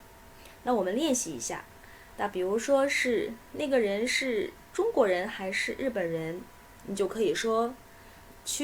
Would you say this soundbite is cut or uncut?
uncut